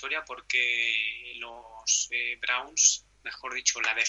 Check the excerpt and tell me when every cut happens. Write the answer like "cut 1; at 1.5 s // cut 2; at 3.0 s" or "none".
cut 1; at 3.1 s